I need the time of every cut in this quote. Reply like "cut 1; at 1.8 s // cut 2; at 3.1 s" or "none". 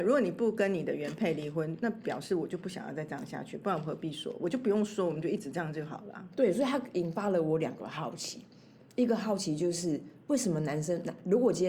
none